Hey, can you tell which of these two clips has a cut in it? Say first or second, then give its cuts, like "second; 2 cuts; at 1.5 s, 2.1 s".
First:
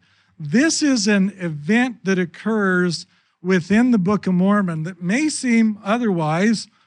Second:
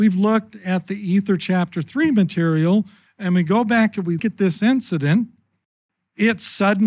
second; 1 cut; at 4.2 s